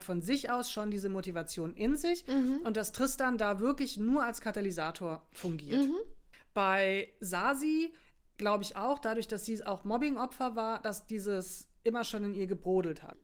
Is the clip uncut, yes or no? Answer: yes